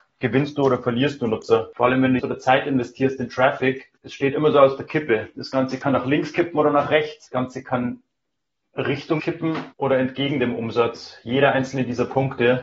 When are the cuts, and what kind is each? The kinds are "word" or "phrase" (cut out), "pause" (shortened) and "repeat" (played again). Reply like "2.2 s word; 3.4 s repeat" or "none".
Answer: 2.2 s phrase; 4.0 s pause; 9.2 s word; 9.7 s pause